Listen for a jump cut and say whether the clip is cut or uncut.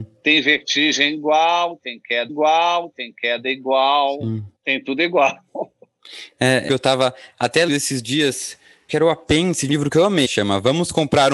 cut